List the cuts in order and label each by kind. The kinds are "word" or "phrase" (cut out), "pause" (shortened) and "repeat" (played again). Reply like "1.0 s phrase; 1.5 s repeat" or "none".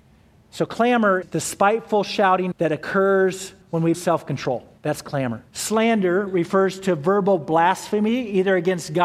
1.2 s word; 2.5 s word; 3.6 s pause; 3.9 s word; 4.8 s pause; 5.5 s pause